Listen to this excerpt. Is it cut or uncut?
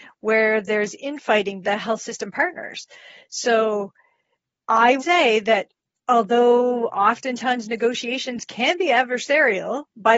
cut